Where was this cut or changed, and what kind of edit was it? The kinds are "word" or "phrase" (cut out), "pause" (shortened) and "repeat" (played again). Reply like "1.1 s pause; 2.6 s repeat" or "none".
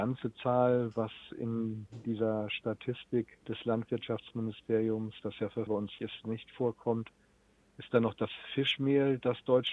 5.7 s word; 6.0 s word